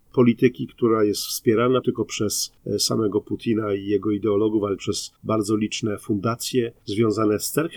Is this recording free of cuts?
no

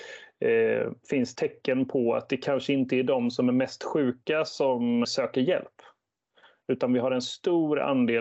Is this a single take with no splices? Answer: no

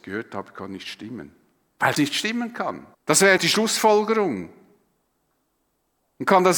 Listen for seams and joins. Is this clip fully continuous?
no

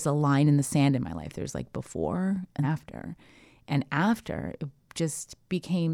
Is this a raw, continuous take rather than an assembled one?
no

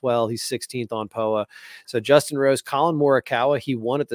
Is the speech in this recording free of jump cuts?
yes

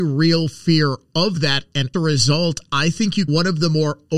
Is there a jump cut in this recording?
yes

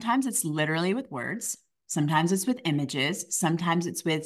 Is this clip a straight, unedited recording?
yes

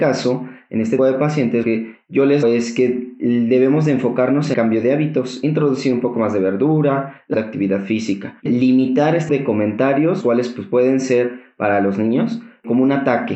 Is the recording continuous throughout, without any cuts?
no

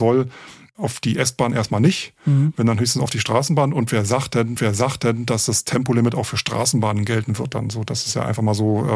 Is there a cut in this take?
yes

